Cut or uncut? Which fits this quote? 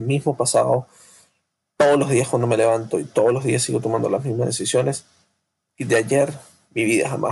uncut